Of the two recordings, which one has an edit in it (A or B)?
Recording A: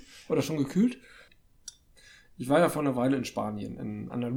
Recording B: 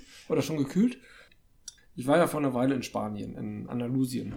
B